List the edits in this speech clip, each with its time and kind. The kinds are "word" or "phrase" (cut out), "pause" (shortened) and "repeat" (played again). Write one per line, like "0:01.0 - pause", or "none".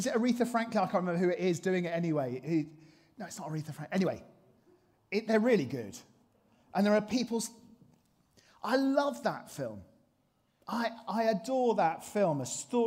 none